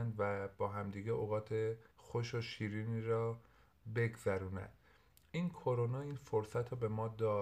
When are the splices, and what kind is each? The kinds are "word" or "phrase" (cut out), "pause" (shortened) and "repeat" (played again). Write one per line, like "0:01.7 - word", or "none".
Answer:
0:01.9 - pause

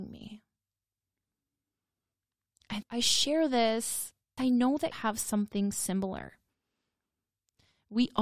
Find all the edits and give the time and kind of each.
0:02.8 - word
0:04.4 - word
0:04.9 - word

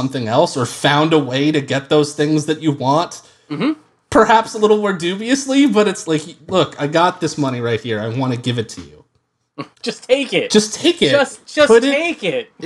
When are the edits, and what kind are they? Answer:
0:04.0 - pause
0:06.0 - word
0:06.5 - word
0:09.7 - pause

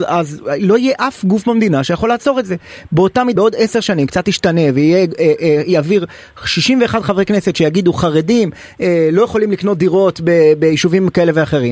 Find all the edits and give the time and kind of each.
0:03.4 - word

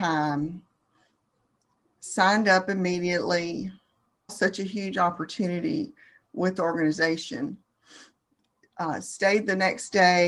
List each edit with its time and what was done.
0:04.3 - word
0:06.6 - word

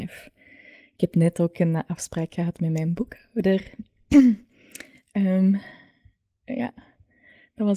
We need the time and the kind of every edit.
none

